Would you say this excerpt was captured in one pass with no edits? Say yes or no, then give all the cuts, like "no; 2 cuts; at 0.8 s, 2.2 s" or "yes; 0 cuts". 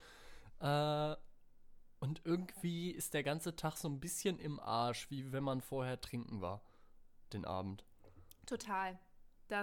yes; 0 cuts